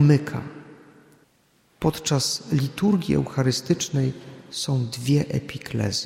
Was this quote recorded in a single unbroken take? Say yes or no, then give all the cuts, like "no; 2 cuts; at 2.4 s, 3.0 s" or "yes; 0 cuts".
no; 1 cut; at 1.2 s